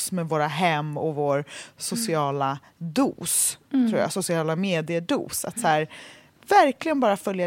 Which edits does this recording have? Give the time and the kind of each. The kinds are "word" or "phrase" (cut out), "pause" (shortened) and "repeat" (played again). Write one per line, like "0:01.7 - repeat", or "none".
none